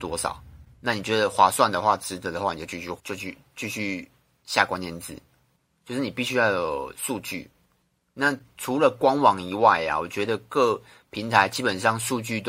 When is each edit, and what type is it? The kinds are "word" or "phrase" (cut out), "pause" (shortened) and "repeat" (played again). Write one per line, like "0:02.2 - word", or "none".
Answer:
0:03.0 - pause